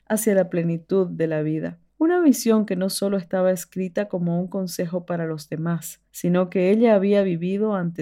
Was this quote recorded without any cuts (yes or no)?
no